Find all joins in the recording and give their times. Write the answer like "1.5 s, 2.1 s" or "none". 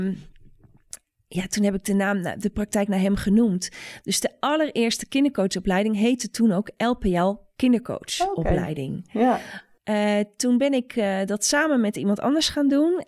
none